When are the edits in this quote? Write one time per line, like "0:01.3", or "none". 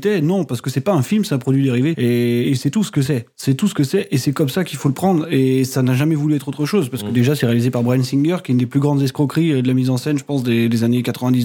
0:02.4